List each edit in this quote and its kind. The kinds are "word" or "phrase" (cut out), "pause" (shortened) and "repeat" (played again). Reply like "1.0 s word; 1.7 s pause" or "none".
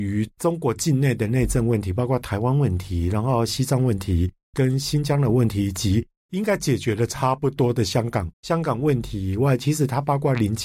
8.3 s pause